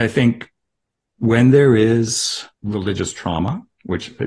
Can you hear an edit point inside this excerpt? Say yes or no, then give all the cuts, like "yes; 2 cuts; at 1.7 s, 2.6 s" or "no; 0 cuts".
yes; 1 cut; at 2.5 s